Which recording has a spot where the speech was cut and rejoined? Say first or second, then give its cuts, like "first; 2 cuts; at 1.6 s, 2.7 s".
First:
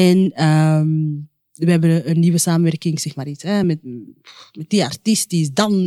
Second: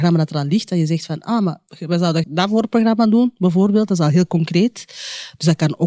second; 2 cuts; at 1.7 s, 2.2 s